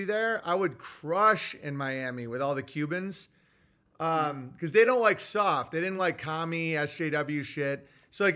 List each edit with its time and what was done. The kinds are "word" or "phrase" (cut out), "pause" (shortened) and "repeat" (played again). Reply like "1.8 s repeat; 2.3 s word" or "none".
none